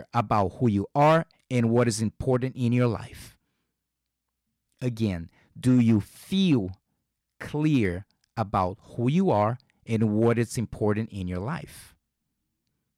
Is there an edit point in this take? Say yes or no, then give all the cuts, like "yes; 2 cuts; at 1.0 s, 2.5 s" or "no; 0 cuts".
no; 0 cuts